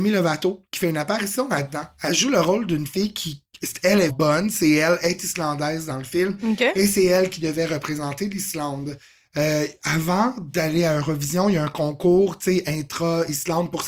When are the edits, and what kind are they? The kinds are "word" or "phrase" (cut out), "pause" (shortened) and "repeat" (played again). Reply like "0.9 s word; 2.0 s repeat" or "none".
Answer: 4.1 s word